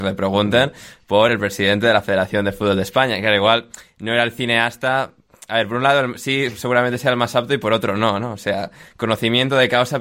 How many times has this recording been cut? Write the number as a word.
zero